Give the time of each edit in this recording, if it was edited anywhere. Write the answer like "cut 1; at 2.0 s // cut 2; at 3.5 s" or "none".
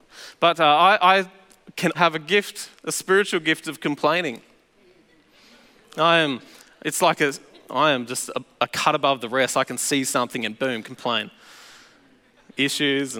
cut 1; at 1.9 s